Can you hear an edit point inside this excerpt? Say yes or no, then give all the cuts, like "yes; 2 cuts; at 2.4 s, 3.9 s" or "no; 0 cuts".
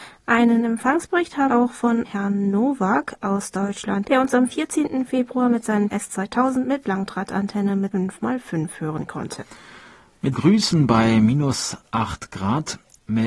yes; 6 cuts; at 1.5 s, 2.0 s, 4.0 s, 5.9 s, 7.9 s, 10.3 s